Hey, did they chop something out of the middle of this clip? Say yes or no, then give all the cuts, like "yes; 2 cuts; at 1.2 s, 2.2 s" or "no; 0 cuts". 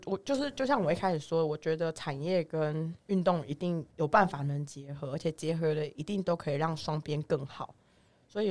yes; 2 cuts; at 3.0 s, 3.9 s